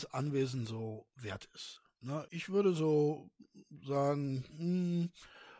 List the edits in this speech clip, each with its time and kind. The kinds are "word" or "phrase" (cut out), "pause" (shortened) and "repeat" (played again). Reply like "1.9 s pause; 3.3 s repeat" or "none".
2.3 s word